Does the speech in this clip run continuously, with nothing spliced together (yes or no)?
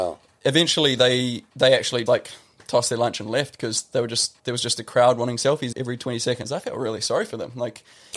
no